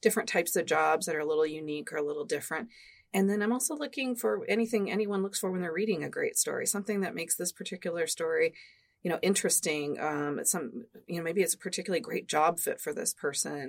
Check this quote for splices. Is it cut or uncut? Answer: uncut